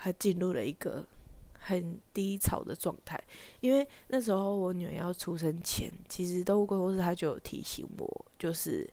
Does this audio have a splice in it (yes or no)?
no